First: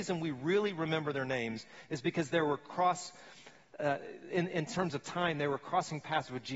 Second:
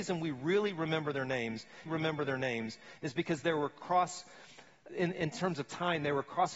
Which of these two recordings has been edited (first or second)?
second